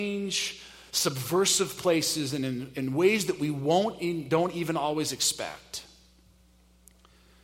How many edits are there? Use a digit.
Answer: 0